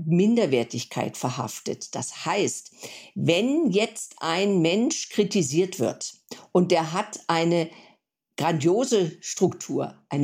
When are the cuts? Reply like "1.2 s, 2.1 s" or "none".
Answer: none